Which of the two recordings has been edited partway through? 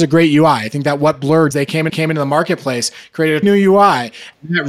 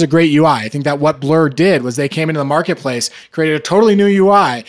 first; 3 cuts; at 1.5 s, 1.9 s, 3.4 s

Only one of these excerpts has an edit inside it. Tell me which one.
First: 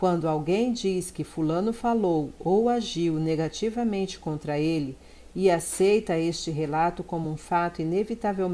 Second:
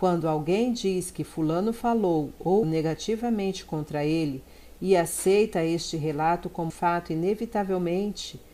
second; 2 cuts; at 2.6 s, 6.7 s

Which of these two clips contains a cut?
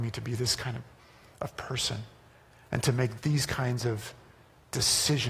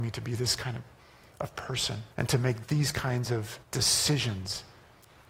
second; 2 cuts; at 2.1 s, 3.6 s

